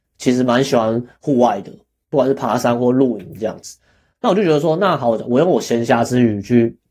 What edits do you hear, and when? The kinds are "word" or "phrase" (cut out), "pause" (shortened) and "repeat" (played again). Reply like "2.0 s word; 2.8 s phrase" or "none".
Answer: none